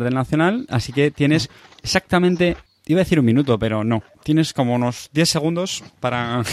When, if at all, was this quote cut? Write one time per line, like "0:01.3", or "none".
0:02.7
0:04.1